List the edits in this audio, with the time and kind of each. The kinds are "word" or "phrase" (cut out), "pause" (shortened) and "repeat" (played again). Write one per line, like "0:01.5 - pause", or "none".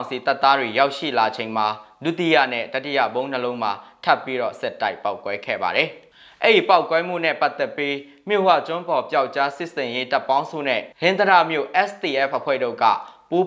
0:10.9 - pause

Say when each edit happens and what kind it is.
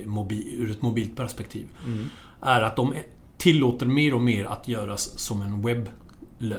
none

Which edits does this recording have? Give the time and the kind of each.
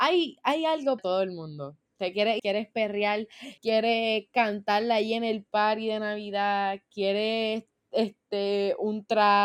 0:01.0 - word
0:01.8 - pause
0:02.4 - word
0:03.6 - pause

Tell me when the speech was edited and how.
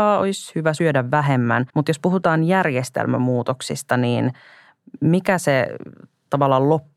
0:01.7 - pause

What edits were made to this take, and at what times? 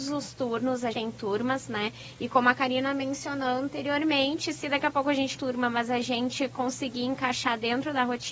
0:00.9 - word
0:05.3 - phrase

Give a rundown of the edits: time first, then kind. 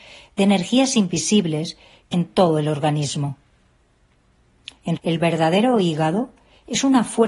0:02.1 - word
0:05.0 - word

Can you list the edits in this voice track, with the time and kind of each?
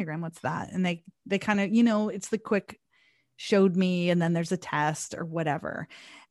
none

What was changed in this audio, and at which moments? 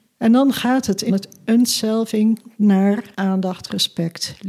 0:01.1 - phrase
0:03.1 - pause

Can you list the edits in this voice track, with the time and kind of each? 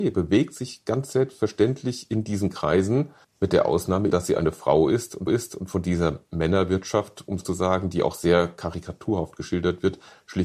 0:03.2 - pause
0:04.1 - word
0:05.3 - repeat
0:07.4 - phrase

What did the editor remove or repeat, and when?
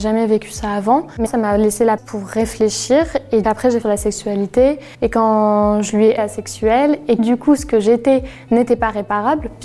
0:01.3 - word
0:02.0 - word
0:03.4 - word
0:03.8 - phrase
0:04.9 - pause
0:06.2 - phrase
0:07.2 - word

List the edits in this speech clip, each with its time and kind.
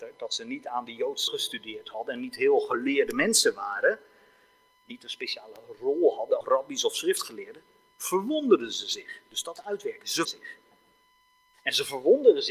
0:01.3 - word
0:06.4 - word
0:09.6 - word
0:10.2 - word

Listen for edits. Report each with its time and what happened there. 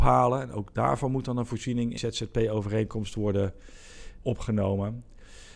0:02.0 - word
0:04.2 - word

